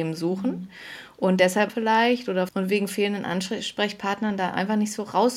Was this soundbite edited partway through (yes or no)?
yes